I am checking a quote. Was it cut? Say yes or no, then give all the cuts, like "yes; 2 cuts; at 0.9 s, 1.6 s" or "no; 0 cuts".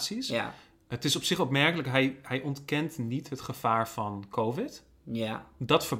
no; 0 cuts